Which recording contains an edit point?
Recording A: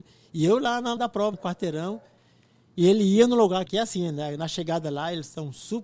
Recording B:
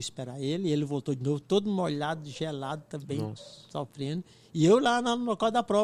A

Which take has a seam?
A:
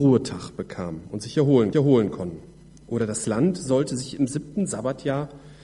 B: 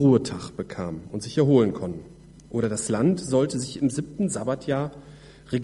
A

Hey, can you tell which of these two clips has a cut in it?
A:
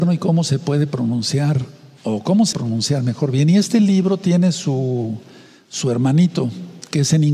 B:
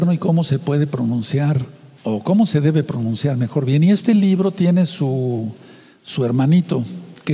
A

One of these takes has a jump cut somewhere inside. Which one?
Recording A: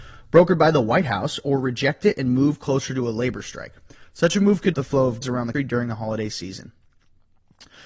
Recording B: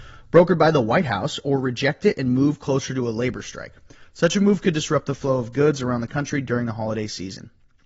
A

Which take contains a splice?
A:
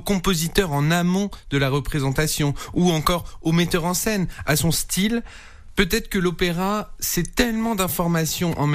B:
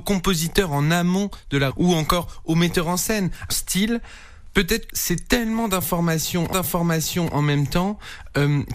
B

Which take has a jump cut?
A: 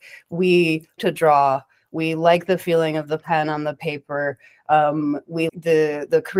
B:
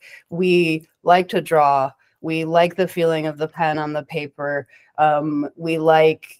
A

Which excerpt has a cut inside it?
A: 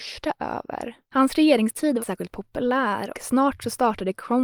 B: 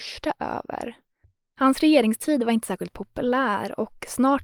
A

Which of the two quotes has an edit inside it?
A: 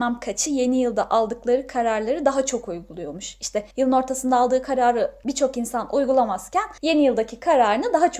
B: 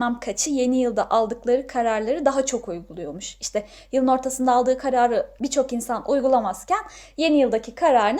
A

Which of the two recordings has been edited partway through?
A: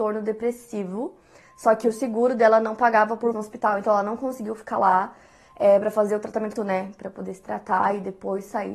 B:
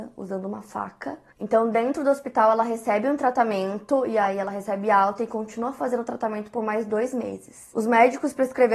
A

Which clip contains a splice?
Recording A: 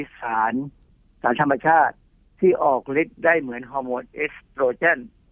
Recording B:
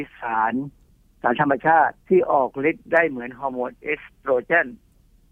B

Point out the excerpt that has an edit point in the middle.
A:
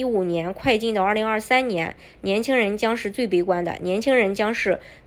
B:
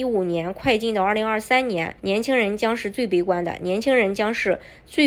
B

